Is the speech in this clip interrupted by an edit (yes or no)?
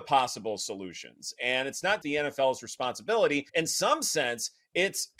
yes